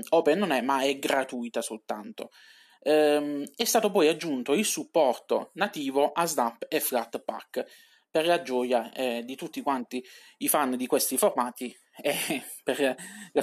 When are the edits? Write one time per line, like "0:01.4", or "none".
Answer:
none